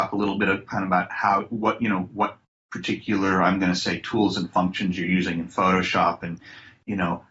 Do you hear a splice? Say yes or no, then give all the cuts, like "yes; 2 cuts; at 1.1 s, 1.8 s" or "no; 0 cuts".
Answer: no; 0 cuts